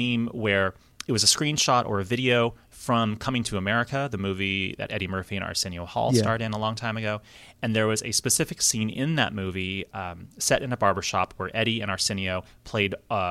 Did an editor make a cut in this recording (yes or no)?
no